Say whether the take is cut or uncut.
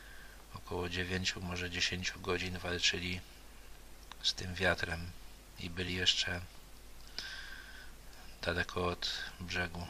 uncut